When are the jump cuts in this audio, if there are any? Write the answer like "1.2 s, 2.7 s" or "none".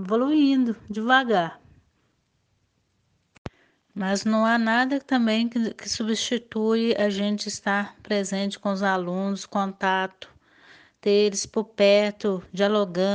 none